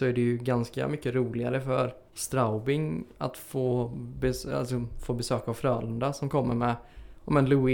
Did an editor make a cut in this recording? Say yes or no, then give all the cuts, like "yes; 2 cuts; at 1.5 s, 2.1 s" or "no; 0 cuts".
yes; 1 cut; at 2.1 s